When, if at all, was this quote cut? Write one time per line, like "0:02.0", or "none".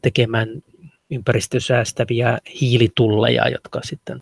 0:01.0